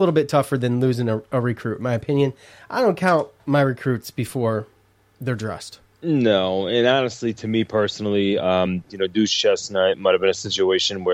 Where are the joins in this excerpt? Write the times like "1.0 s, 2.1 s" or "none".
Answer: none